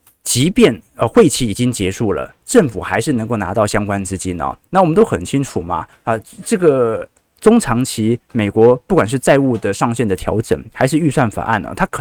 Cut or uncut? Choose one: uncut